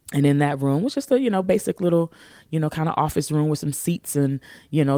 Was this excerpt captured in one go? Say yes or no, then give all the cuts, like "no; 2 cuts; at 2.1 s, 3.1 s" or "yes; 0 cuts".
yes; 0 cuts